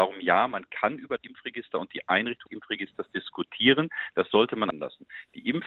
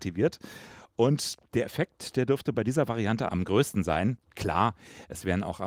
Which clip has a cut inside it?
first; 3 cuts; at 1.2 s, 2.5 s, 4.7 s

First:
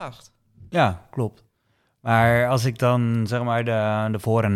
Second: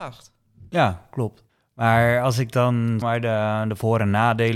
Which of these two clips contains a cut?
second; 2 cuts; at 1.5 s, 3.0 s

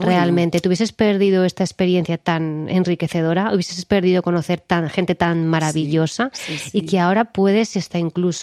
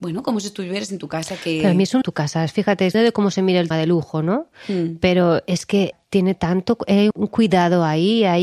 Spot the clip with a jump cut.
second; 5 cuts; at 2.0 s, 2.9 s, 3.7 s, 5.9 s, 7.1 s

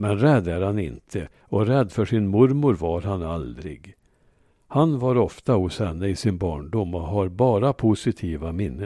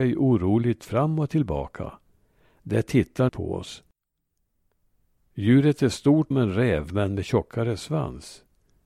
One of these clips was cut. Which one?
second; 2 cuts; at 3.3 s, 6.3 s

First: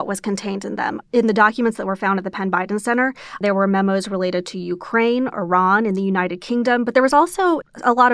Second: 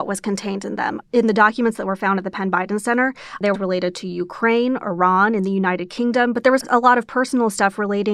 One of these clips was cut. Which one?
second; 2 cuts; at 3.5 s, 6.6 s

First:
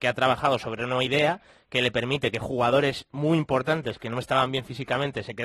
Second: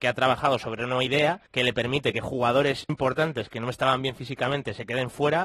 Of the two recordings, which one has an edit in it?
second; 2 cuts; at 1.5 s, 2.9 s

